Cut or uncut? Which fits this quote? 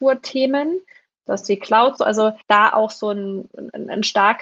cut